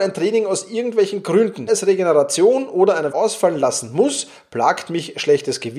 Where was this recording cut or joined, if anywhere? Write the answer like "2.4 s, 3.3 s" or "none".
1.7 s, 3.1 s